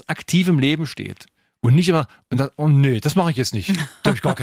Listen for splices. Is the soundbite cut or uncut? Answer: uncut